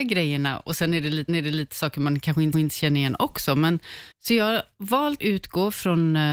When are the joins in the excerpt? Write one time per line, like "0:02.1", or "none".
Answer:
0:01.3
0:02.5
0:04.1
0:05.2